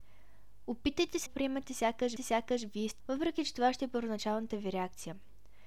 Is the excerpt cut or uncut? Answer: cut